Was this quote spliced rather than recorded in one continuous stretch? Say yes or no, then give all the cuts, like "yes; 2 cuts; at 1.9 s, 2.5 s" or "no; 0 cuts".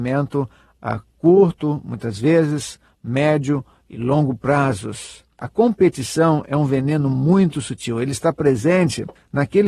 no; 0 cuts